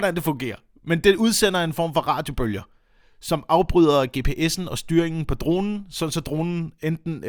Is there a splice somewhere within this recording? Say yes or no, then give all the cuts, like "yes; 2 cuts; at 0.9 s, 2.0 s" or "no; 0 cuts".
no; 0 cuts